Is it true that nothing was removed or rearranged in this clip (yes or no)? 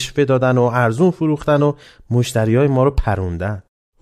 yes